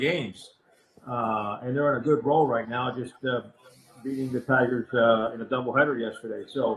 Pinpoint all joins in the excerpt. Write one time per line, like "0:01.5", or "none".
none